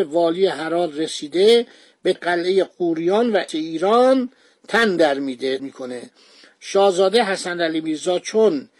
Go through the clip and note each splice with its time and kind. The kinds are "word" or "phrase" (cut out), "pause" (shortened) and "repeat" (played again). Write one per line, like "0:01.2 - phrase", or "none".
0:02.1 - word
0:03.5 - phrase
0:05.6 - word